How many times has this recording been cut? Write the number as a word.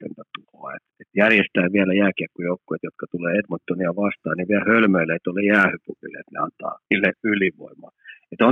one